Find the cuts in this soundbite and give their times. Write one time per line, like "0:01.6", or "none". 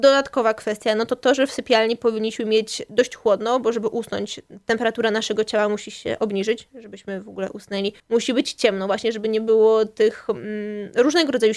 0:08.0